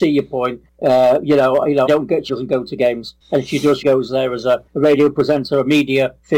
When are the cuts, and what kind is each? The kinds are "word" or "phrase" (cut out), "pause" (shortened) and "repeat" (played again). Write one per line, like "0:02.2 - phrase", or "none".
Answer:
0:01.9 - word
0:02.3 - word
0:03.8 - word